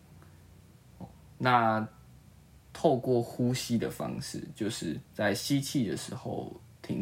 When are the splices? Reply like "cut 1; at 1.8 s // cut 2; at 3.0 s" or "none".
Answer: cut 1; at 5.0 s